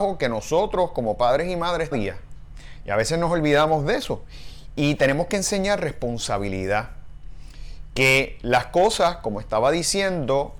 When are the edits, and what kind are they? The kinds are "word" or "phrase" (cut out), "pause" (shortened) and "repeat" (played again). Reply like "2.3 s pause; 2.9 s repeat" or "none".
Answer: 1.9 s phrase